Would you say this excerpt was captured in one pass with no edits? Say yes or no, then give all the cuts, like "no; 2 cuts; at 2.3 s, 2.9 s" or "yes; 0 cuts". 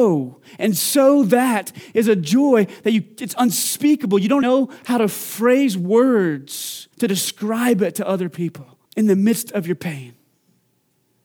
no; 3 cuts; at 4.4 s, 6.9 s, 8.9 s